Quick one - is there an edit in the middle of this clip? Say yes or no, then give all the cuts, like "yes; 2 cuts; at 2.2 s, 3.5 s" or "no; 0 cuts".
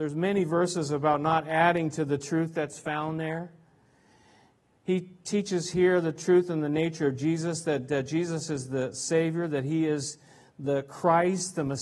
no; 0 cuts